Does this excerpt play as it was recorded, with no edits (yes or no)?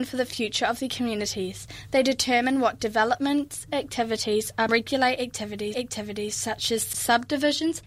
no